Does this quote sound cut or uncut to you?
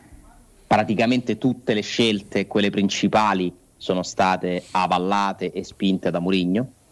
uncut